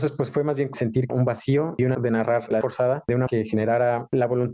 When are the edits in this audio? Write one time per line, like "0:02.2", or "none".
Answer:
0:01.1
0:01.9
0:02.6
0:03.3